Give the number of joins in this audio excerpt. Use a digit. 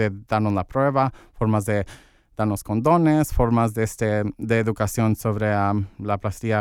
0